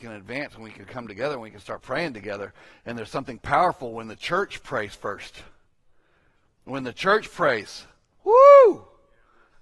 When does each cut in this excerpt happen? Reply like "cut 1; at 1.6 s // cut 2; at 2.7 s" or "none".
none